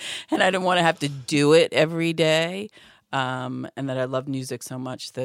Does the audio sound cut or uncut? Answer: uncut